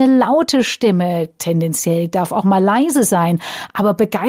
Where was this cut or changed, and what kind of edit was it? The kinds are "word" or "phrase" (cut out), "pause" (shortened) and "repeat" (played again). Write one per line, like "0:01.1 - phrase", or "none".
none